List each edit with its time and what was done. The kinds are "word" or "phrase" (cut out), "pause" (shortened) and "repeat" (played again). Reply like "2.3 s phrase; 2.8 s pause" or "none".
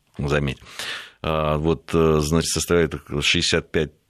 2.4 s word